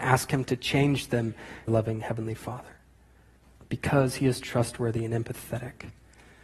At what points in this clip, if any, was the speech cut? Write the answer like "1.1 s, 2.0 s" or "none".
1.7 s, 3.4 s